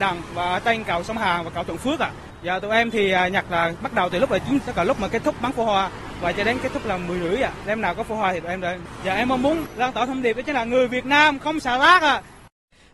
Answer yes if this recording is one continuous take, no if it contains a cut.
no